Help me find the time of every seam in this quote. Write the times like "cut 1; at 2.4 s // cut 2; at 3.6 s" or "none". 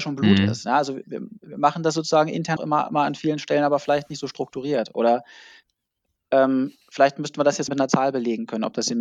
cut 1; at 2.6 s // cut 2; at 6.8 s // cut 3; at 7.7 s